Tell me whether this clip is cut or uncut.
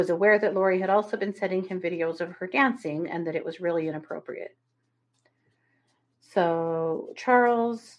uncut